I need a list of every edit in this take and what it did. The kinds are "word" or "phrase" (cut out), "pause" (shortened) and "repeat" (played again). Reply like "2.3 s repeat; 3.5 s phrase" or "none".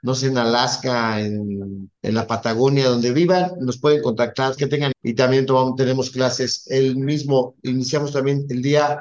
2.0 s pause; 4.6 s word; 4.9 s word